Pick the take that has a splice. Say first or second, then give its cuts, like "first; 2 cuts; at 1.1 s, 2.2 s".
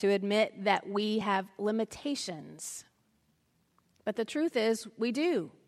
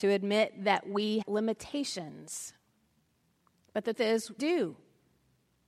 second; 3 cuts; at 1.2 s, 3.9 s, 4.4 s